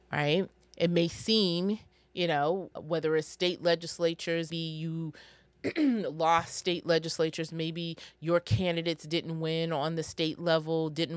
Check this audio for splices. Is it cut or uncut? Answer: cut